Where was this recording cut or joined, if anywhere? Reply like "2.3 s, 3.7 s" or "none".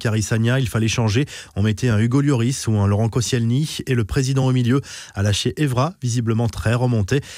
none